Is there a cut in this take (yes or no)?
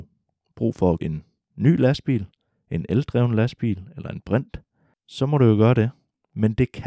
yes